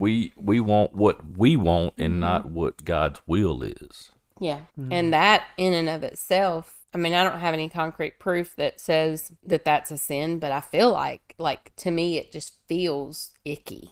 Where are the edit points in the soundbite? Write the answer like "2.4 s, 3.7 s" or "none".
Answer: 4.7 s, 6.8 s, 9.4 s